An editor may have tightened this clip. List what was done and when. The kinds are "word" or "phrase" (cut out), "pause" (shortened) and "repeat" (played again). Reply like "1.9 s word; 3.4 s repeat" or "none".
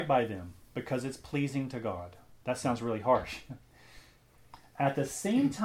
2.4 s pause